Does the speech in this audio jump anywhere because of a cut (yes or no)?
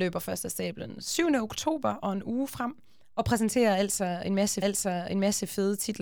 yes